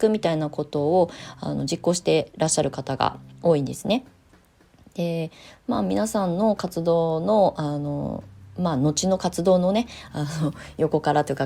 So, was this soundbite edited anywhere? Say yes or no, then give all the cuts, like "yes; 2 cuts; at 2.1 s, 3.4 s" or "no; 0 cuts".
no; 0 cuts